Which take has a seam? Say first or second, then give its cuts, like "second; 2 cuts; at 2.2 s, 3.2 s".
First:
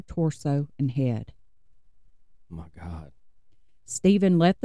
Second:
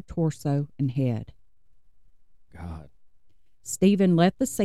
second; 1 cut; at 2.5 s